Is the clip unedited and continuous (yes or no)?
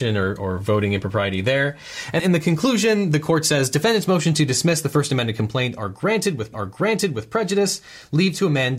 no